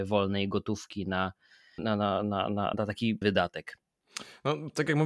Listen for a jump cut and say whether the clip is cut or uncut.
cut